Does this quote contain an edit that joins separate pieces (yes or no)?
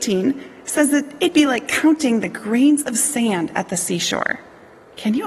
no